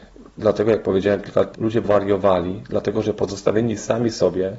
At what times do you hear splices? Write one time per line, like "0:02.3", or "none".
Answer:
0:01.5
0:01.8